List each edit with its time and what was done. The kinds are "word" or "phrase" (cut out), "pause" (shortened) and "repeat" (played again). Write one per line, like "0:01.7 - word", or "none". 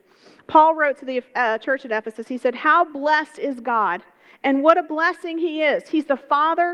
none